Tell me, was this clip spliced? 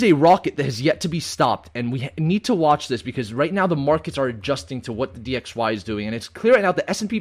no; 0 cuts

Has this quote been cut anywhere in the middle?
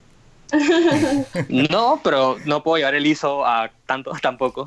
no; 0 cuts

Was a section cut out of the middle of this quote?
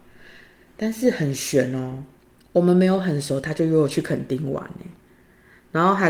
yes; 1 cut; at 2.2 s

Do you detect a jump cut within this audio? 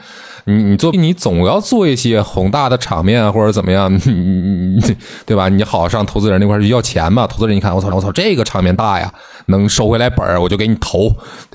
yes; 2 cuts; at 0.9 s, 7.9 s

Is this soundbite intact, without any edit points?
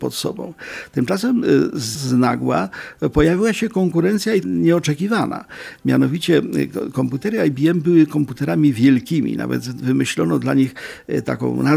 no; 2 cuts; at 2.0 s, 4.4 s

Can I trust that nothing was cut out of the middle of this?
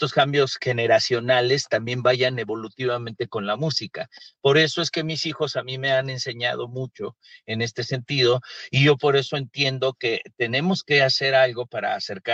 yes; 0 cuts

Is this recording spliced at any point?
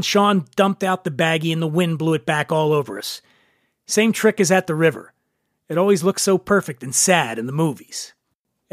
no; 0 cuts

